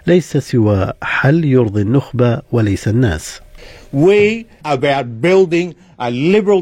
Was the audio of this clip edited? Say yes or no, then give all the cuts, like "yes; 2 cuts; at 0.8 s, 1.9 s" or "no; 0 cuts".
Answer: yes; 1 cut; at 4.6 s